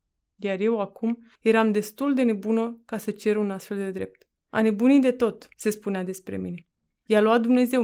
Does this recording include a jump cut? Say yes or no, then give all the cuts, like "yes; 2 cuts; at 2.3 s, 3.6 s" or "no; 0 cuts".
yes; 3 cuts; at 1.4 s, 4.4 s, 5.5 s